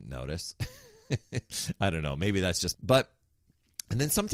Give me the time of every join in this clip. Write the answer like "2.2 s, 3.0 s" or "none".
2.7 s